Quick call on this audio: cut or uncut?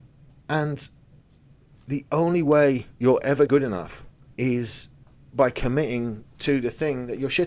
cut